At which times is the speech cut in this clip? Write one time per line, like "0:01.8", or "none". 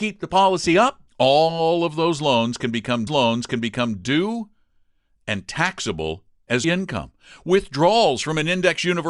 0:01.1
0:03.1
0:06.6

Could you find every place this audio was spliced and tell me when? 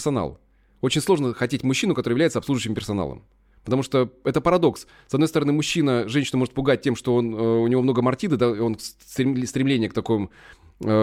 none

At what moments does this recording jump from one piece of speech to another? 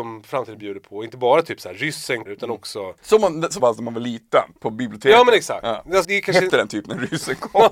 0:02.3
0:03.0
0:03.6
0:04.6
0:06.0
0:06.5

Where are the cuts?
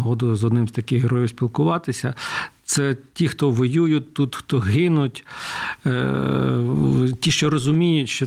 none

